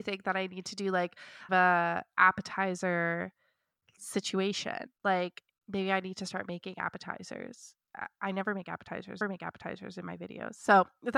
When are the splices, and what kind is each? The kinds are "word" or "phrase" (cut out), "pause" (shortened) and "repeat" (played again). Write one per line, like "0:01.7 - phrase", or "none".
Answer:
0:01.5 - phrase
0:05.0 - pause
0:09.2 - repeat